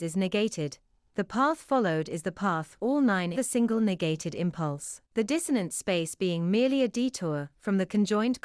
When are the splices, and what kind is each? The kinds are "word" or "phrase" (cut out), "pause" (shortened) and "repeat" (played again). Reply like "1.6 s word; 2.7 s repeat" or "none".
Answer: 2.8 s phrase; 3.3 s phrase; 5.0 s pause